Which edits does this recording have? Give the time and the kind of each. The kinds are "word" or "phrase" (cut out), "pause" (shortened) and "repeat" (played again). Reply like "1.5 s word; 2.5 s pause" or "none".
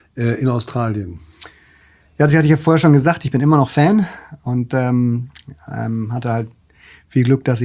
none